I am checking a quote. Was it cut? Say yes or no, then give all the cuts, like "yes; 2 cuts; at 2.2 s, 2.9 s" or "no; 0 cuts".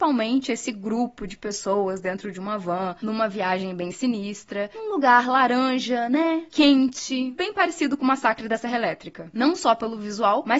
no; 0 cuts